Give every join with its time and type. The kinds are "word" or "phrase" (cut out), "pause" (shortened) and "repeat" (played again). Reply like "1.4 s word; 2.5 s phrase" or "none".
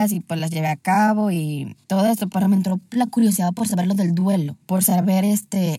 1.8 s pause; 4.6 s pause